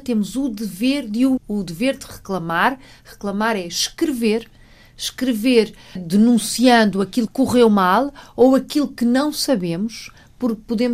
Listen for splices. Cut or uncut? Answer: cut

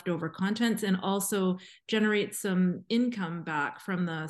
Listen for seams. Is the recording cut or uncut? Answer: uncut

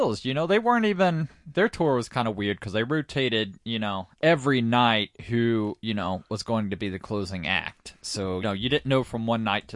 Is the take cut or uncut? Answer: cut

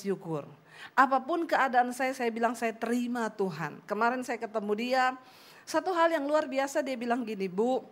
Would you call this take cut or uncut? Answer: uncut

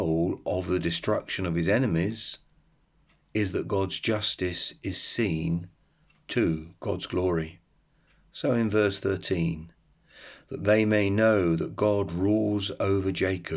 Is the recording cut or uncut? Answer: uncut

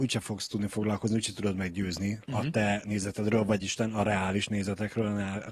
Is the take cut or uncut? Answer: cut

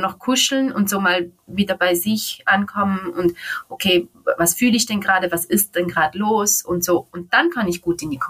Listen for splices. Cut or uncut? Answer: uncut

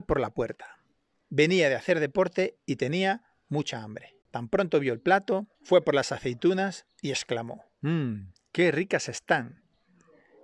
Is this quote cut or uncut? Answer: cut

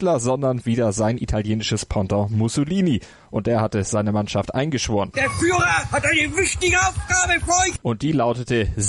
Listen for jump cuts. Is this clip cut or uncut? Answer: uncut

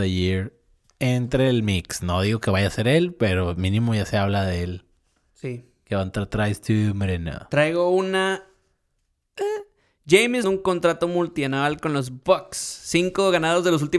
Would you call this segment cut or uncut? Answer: cut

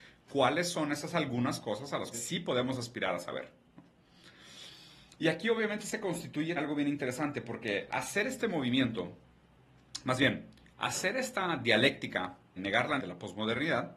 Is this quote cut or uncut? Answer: cut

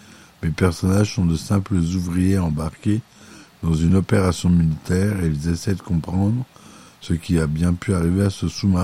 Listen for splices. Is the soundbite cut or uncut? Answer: uncut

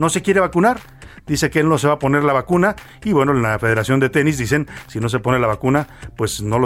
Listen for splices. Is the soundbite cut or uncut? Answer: uncut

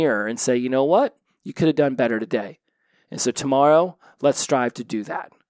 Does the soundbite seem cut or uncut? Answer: uncut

